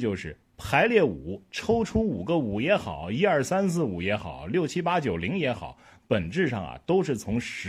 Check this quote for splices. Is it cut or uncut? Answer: uncut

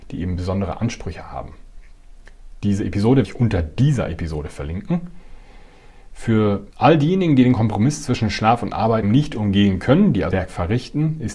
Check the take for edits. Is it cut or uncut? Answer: cut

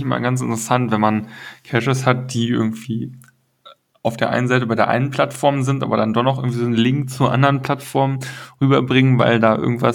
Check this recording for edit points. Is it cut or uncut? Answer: uncut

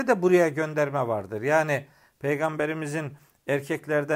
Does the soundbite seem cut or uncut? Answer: uncut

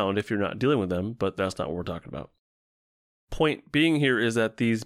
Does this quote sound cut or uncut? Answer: uncut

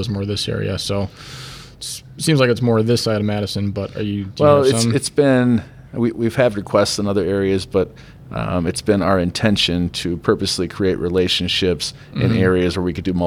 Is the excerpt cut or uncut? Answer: uncut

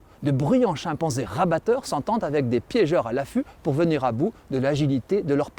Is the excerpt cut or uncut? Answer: uncut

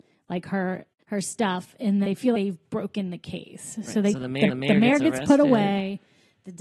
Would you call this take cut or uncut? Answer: cut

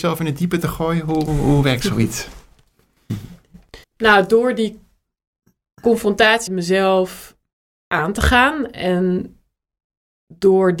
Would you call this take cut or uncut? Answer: cut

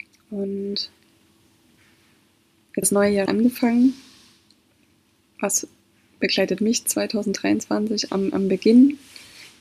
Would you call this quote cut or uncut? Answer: cut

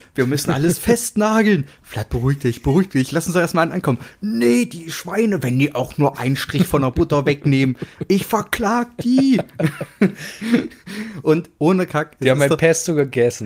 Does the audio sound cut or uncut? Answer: uncut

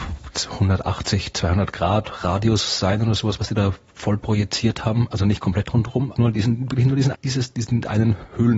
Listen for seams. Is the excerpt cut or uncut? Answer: cut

